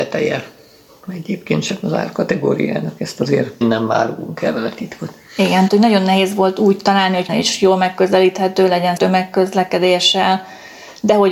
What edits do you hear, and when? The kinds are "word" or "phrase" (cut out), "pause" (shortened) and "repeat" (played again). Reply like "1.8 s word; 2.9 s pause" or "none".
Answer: 3.6 s word; 5.7 s word; 7.3 s phrase; 9.0 s word